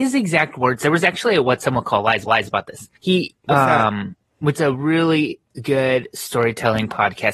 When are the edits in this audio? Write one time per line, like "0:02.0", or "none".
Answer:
0:02.3
0:03.0
0:04.5